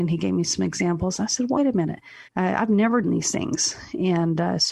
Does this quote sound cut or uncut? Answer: cut